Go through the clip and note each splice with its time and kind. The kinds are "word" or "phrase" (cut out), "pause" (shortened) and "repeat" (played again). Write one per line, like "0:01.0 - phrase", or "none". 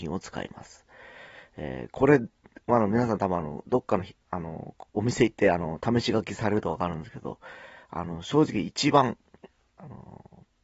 0:04.9 - pause
0:09.6 - pause